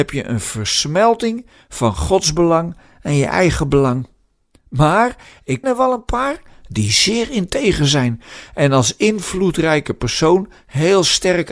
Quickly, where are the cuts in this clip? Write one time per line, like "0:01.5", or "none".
0:05.6